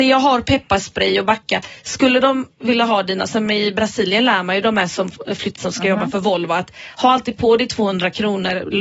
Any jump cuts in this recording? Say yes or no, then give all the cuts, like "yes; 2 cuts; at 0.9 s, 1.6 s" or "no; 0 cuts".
yes; 1 cut; at 5.6 s